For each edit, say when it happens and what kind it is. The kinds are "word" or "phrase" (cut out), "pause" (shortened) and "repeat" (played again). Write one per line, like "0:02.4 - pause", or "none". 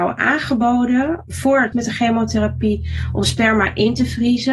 0:01.3 - word
0:01.7 - phrase